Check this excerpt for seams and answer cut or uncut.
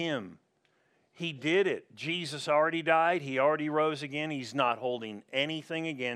uncut